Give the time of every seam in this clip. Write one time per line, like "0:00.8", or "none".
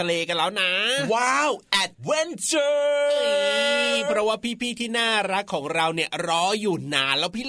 0:01.9